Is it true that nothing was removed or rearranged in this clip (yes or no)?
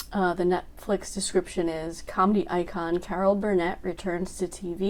yes